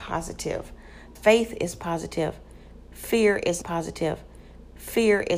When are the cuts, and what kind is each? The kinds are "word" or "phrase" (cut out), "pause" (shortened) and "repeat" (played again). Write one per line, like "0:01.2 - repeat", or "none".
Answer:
0:01.2 - word
0:03.6 - repeat